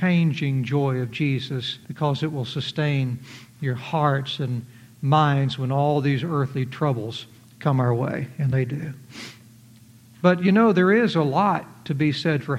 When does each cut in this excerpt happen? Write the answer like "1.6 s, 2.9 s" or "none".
1.8 s